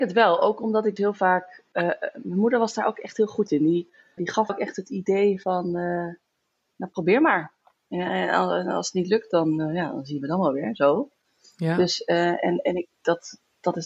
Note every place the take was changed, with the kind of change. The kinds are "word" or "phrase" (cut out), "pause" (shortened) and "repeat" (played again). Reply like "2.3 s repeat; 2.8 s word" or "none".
1.0 s word; 4.2 s word; 4.5 s word